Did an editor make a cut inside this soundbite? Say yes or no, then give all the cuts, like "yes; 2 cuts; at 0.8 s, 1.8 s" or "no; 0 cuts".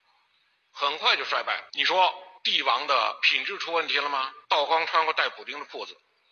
yes; 3 cuts; at 1.7 s, 2.4 s, 4.4 s